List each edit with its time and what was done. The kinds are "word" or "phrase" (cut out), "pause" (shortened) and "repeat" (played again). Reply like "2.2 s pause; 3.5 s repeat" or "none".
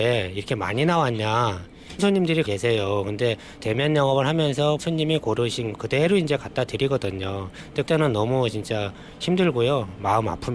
2.0 s word; 2.4 s word; 3.6 s word; 4.8 s word; 5.7 s word; 7.9 s word